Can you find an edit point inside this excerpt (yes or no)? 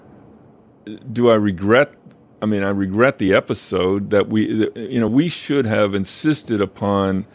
no